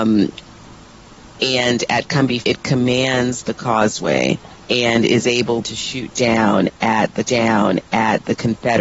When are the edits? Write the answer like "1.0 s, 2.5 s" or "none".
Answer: 1.3 s, 2.4 s, 4.6 s, 5.6 s, 7.3 s